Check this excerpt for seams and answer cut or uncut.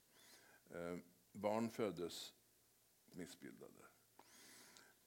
cut